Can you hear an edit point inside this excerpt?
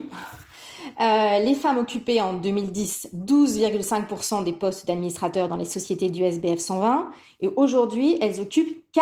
no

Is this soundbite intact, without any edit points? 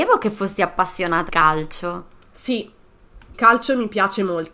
no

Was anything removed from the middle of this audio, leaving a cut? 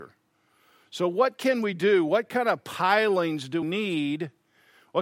yes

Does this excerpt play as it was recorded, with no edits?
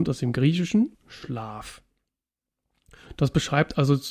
no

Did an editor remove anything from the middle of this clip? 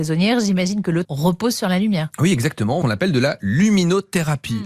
yes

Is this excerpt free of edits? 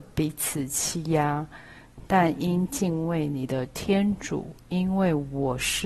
no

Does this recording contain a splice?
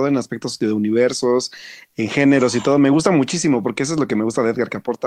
no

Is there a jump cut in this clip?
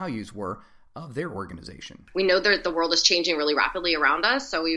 no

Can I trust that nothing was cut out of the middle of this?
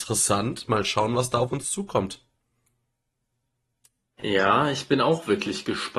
yes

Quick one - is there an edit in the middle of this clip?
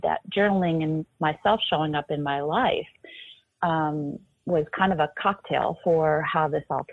no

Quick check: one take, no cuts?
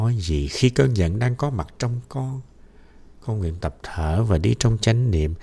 yes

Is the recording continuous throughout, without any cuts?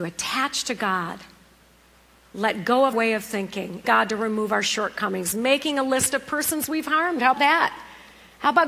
no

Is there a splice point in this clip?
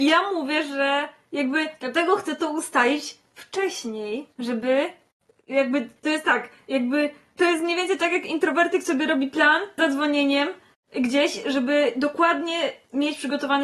yes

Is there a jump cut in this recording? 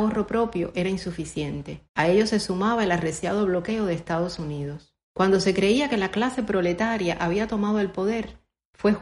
yes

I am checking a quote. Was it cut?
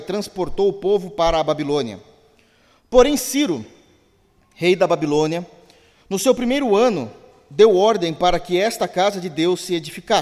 no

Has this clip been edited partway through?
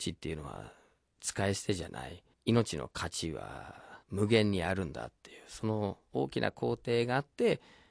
yes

